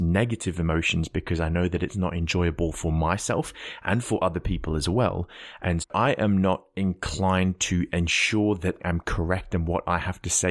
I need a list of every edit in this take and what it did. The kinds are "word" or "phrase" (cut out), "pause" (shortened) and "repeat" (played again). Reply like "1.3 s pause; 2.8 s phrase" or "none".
5.8 s word; 8.8 s word

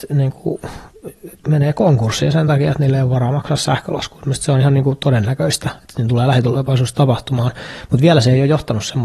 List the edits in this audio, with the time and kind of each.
none

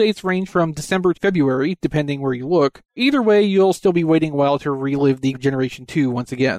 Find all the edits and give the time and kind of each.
1.1 s word; 3.0 s word; 5.3 s word

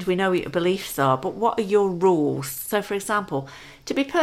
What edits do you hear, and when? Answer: none

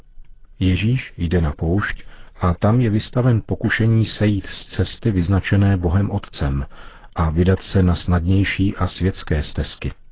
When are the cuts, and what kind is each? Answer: none

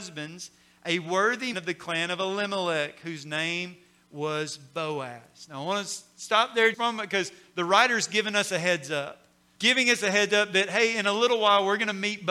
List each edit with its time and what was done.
1.5 s word; 6.7 s word; 9.6 s word

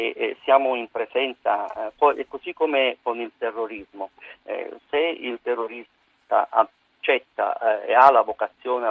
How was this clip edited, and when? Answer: none

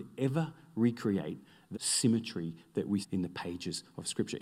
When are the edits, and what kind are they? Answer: 1.7 s word; 3.0 s word

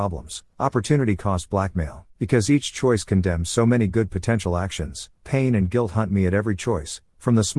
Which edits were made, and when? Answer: 2.1 s pause

